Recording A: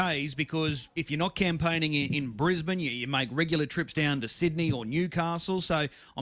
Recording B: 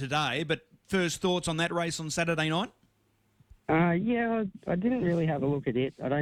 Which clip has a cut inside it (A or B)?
B